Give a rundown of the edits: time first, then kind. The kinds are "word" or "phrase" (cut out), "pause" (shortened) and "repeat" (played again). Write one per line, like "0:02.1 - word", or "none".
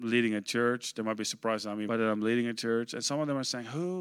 0:01.9 - phrase